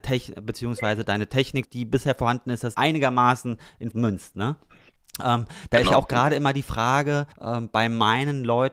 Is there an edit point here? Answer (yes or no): yes